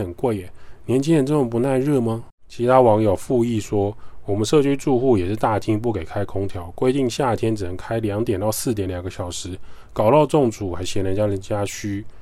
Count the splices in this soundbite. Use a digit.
1